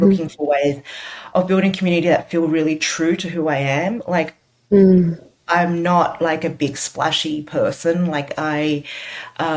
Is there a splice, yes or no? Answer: no